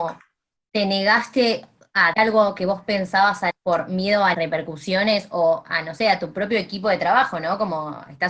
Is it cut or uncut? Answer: cut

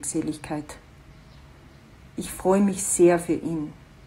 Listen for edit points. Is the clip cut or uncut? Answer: uncut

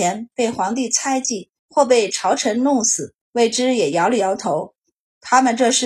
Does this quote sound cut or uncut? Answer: cut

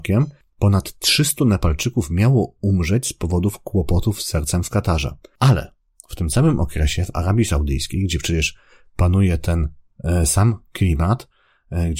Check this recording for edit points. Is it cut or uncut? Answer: uncut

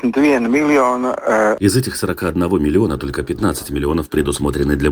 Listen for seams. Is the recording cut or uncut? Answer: uncut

